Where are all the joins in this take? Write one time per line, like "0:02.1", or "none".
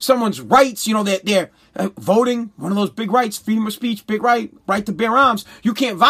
none